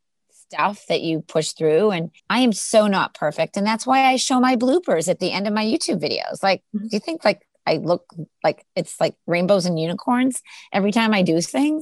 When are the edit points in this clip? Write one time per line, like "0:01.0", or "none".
0:02.2